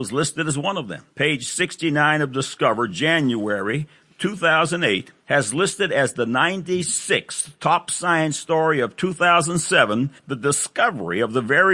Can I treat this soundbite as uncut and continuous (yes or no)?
no